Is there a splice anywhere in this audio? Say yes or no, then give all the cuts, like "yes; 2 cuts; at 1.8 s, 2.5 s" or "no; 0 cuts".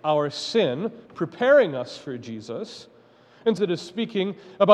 yes; 2 cuts; at 1.0 s, 3.6 s